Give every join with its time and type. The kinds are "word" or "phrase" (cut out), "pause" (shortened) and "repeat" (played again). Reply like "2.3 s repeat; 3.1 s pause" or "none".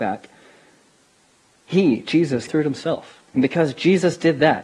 2.5 s word; 3.3 s pause